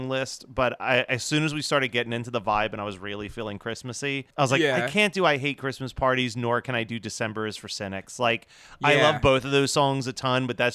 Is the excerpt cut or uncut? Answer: cut